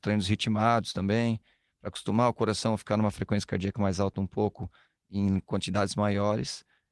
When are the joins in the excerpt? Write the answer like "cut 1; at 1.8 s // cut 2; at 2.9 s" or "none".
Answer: none